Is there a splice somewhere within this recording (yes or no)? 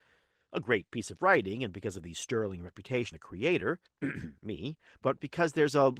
yes